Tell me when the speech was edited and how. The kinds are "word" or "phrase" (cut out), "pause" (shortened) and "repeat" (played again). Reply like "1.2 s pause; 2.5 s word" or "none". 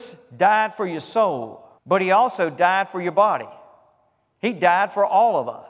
1.8 s pause